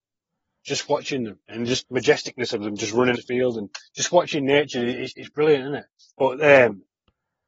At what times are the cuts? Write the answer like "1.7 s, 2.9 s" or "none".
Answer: 1.4 s, 1.8 s, 3.1 s, 3.8 s, 5.1 s, 6.0 s